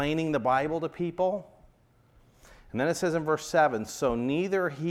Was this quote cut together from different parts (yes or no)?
no